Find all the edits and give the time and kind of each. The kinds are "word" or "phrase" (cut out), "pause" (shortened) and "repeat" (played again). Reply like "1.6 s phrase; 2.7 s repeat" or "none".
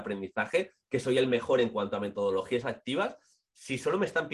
none